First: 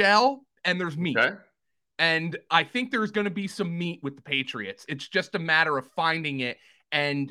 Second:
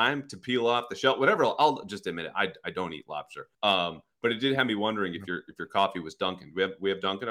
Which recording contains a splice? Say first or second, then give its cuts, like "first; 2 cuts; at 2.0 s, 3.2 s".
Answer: second; 1 cut; at 3.5 s